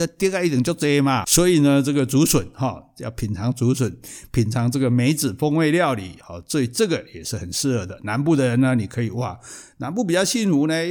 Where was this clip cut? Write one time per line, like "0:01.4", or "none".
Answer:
0:01.2